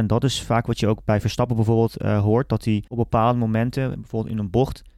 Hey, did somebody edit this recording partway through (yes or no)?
yes